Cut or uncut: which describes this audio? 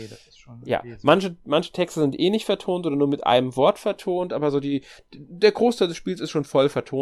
uncut